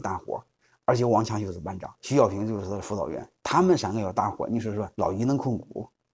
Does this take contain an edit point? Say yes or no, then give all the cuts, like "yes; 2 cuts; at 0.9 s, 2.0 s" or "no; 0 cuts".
yes; 3 cuts; at 1.9 s, 3.4 s, 4.9 s